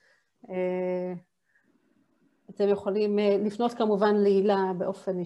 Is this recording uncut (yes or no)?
yes